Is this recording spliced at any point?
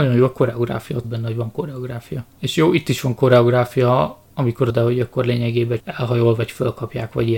yes; 5 cuts; at 1.0 s, 2.3 s, 4.2 s, 4.7 s, 5.8 s

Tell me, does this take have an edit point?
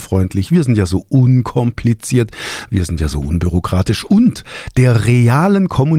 no; 0 cuts

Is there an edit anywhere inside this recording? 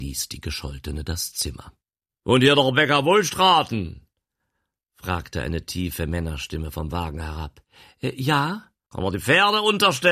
no; 0 cuts

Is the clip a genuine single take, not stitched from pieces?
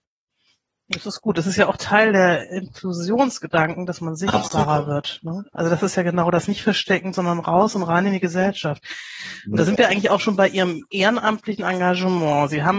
yes; 0 cuts

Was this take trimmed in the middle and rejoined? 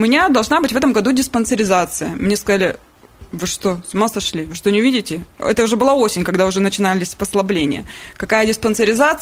no; 0 cuts

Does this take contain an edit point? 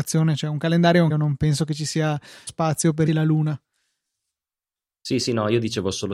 yes; 3 cuts; at 1.1 s, 2.5 s, 3.1 s

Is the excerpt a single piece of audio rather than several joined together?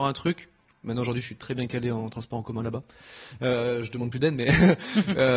yes; 0 cuts

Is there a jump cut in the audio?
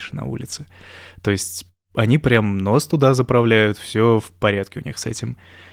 no; 0 cuts

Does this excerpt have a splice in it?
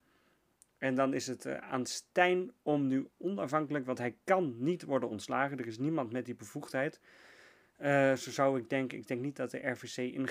no; 0 cuts

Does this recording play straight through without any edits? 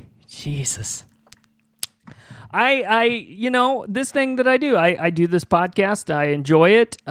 no; 1 cut; at 4.1 s

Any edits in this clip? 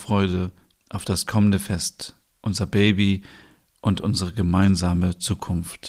no; 0 cuts

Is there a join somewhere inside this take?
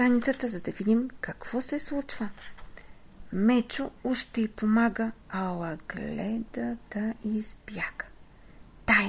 no; 0 cuts

